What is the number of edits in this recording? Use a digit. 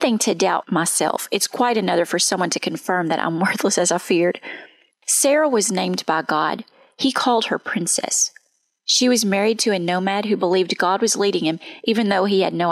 1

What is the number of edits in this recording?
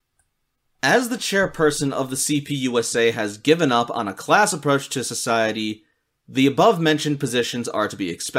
0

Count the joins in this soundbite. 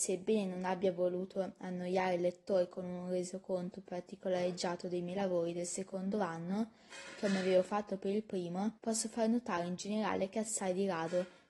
1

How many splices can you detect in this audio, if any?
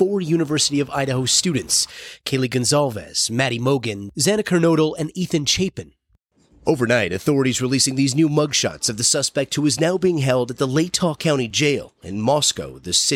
0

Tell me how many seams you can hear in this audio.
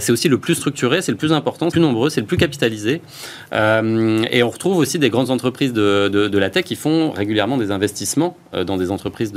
1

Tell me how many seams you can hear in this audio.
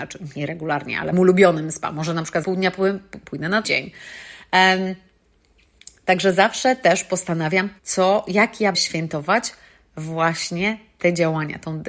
5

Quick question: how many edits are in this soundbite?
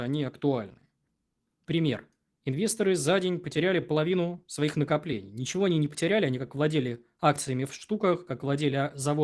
0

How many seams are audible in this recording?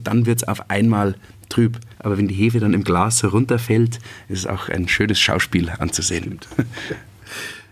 1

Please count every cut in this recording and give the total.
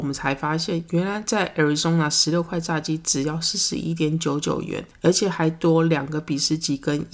0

